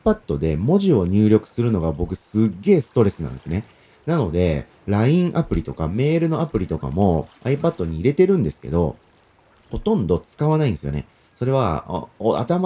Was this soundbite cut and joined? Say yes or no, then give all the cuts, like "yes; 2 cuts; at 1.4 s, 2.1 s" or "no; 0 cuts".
no; 0 cuts